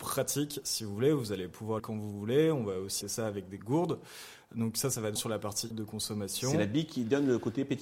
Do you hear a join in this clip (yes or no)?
yes